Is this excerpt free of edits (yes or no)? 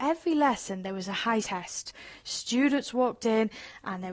no